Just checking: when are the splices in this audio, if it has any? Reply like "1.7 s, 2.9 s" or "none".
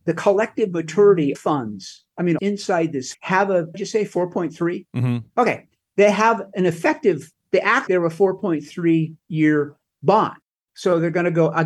1.3 s, 2.4 s, 3.1 s, 3.7 s, 5.3 s, 7.4 s, 7.9 s, 9.2 s